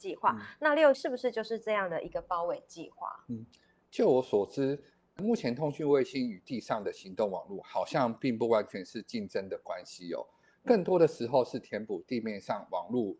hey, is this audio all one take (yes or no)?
no